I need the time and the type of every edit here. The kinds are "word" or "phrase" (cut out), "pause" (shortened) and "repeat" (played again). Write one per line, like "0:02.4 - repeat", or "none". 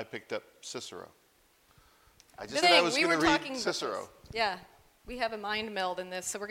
0:02.6 - word